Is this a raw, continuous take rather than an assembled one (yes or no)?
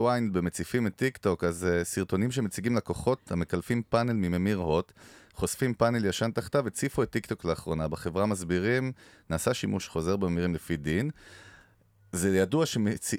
yes